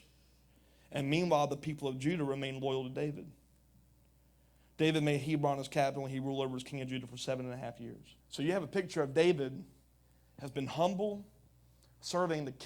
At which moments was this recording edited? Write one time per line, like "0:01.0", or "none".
0:08.2

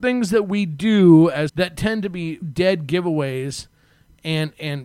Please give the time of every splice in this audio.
0:01.5
0:02.4

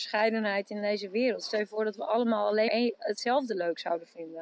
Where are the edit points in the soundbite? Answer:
0:02.7

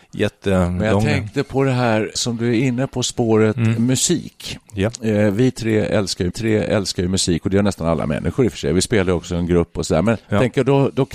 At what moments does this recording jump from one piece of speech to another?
0:02.2
0:06.3
0:10.2

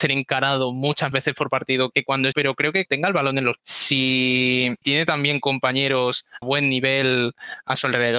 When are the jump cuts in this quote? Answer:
0:01.1
0:01.9
0:02.3
0:02.8
0:03.6
0:04.8
0:06.4

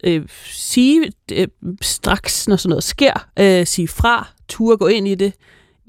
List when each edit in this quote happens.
none

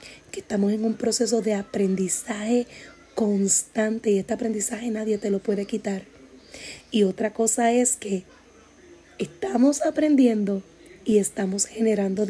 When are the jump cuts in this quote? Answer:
none

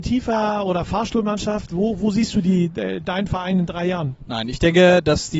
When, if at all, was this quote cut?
none

